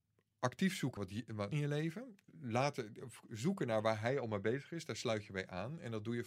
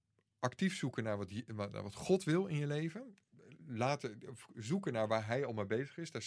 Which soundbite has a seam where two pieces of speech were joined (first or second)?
first